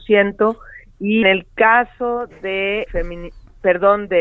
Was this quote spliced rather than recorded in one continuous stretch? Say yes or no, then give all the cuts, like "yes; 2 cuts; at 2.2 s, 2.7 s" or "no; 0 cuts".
yes; 2 cuts; at 1.2 s, 2.9 s